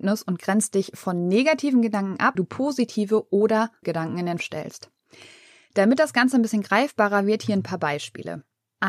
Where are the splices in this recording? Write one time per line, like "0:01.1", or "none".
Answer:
0:02.3
0:03.8
0:04.4

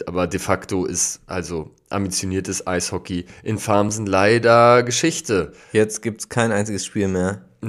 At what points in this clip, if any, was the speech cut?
0:05.6

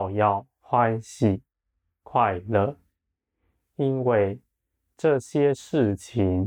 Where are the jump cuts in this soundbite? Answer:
none

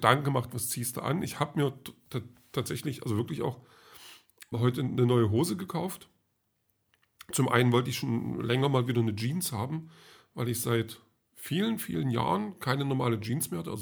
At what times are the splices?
0:04.5

